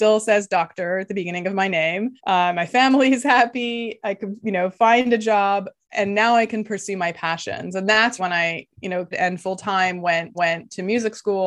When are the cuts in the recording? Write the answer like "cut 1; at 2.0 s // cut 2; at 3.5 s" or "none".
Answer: cut 1; at 2.2 s // cut 2; at 8.2 s // cut 3; at 9.1 s // cut 4; at 10.3 s